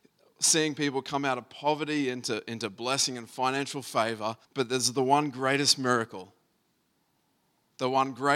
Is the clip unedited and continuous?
no; 1 cut; at 4.4 s

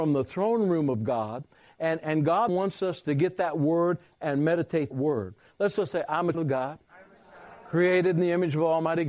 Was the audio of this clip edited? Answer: yes; 4 cuts; at 2.0 s, 2.5 s, 4.9 s, 6.3 s

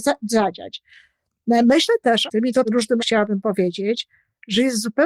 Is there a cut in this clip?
yes; 3 cuts; at 2.3 s, 2.6 s, 3.0 s

